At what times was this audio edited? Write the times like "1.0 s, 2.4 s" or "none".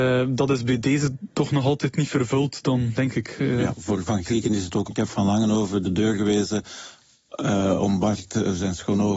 3.0 s, 4.9 s